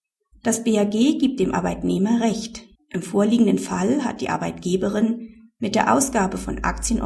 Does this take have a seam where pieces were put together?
yes; 1 cut; at 2.7 s

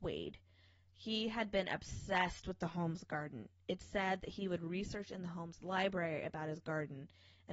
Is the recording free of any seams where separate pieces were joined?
yes; 0 cuts

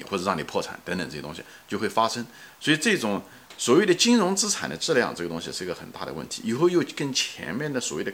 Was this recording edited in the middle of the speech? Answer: yes; 1 cut; at 3.5 s

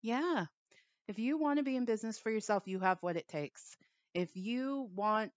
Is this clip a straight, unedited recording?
yes; 0 cuts

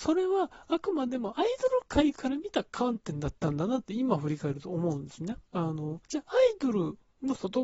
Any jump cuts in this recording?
yes; 2 cuts; at 5.5 s, 6.0 s

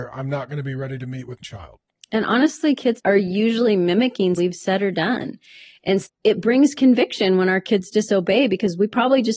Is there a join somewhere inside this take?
yes; 4 cuts; at 1.4 s, 3.0 s, 4.4 s, 6.0 s

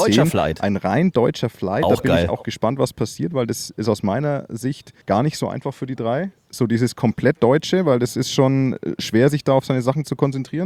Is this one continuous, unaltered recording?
no; 1 cut; at 5.0 s

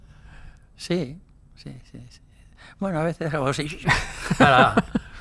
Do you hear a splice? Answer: no; 0 cuts

